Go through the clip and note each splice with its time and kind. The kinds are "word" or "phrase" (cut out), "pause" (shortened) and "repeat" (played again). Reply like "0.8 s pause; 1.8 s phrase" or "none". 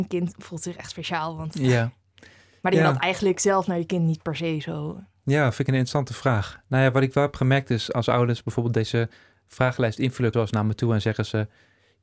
10.3 s word